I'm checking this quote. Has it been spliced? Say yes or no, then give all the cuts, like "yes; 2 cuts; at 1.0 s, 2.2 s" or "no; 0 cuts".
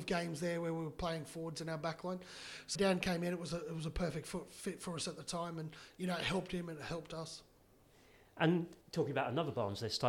yes; 2 cuts; at 2.7 s, 8.8 s